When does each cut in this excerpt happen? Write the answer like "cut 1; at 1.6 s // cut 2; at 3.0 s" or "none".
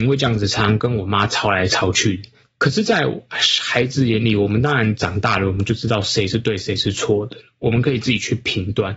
none